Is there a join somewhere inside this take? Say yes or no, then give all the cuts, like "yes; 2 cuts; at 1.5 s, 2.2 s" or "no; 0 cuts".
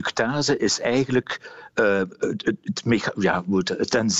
no; 0 cuts